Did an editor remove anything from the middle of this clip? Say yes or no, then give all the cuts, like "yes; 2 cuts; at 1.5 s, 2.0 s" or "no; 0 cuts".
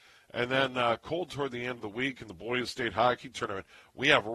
no; 0 cuts